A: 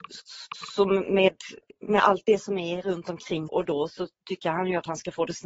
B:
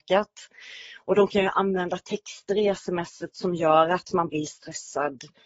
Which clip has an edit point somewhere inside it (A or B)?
A